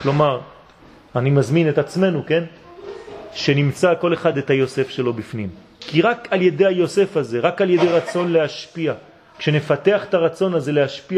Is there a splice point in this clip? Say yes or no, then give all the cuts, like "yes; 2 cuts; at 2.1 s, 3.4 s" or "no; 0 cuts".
no; 0 cuts